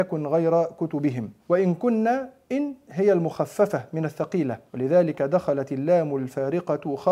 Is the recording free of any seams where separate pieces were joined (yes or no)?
no